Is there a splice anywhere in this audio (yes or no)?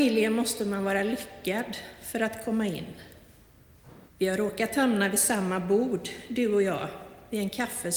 yes